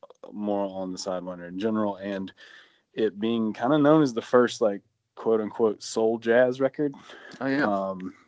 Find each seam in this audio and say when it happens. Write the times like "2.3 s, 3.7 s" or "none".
none

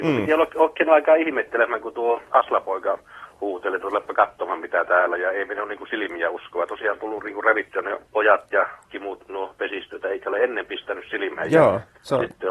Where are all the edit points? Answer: 8.0 s, 8.9 s, 10.0 s

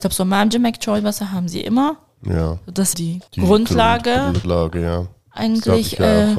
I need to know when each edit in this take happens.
2.9 s, 3.3 s, 4.4 s

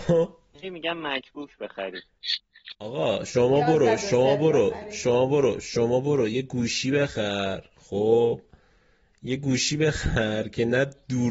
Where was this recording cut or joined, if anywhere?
none

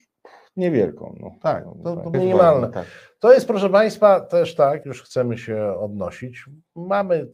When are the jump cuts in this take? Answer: 2.1 s, 4.8 s

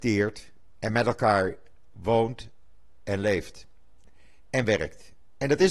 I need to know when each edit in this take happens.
none

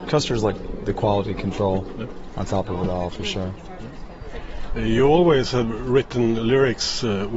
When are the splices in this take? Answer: none

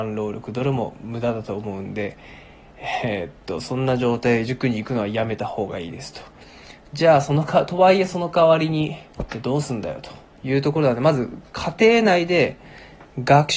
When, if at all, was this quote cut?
9.1 s

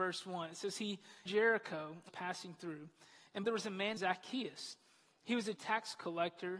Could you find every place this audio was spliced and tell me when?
1.3 s, 2.1 s, 3.4 s, 4.0 s, 5.6 s

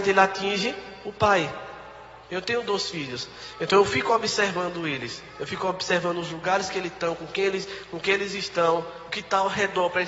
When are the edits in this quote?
2.2 s

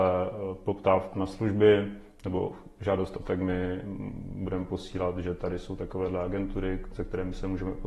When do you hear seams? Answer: 1.1 s, 3.2 s

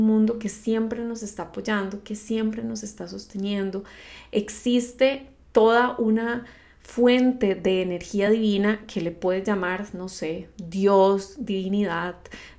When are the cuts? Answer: none

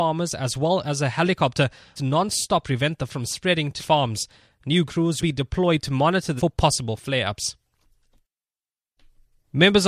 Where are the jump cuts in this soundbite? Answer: 2.0 s, 2.6 s, 3.1 s, 3.8 s, 4.9 s, 5.2 s, 6.4 s

